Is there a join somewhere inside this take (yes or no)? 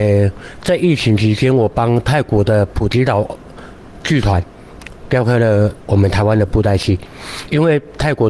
no